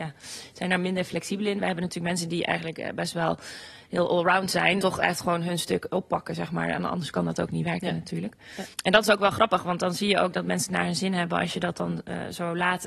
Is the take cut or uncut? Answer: cut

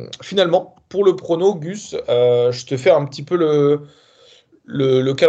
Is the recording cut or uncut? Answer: uncut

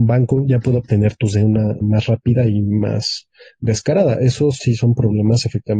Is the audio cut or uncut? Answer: cut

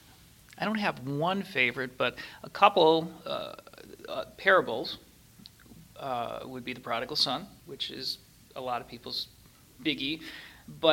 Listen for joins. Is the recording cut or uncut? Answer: cut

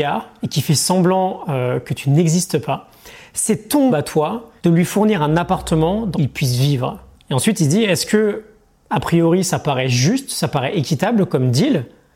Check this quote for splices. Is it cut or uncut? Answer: cut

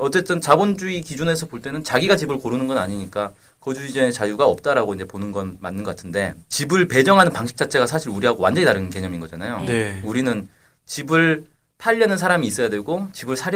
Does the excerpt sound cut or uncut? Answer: uncut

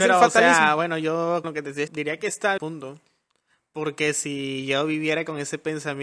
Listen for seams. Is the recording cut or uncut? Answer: cut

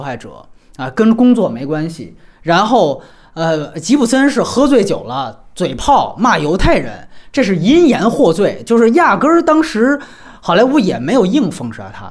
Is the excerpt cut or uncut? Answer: uncut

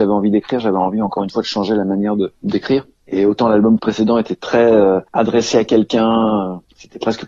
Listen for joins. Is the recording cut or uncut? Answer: uncut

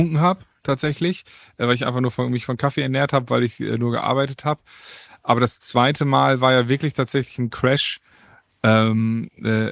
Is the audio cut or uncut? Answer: uncut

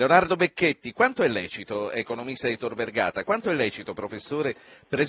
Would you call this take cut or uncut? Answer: uncut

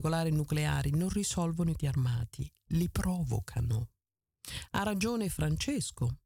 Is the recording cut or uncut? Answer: cut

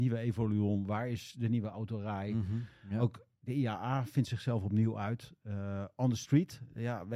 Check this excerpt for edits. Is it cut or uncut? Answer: uncut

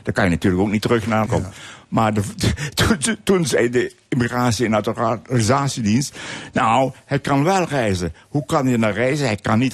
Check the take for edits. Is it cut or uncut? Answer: cut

